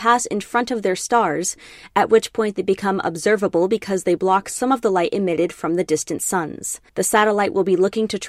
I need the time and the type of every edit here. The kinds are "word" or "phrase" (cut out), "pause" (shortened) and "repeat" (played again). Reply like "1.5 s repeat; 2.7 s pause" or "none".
6.9 s pause